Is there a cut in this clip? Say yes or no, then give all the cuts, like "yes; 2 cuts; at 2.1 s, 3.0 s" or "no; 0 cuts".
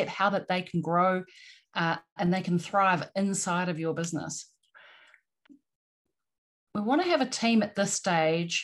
no; 0 cuts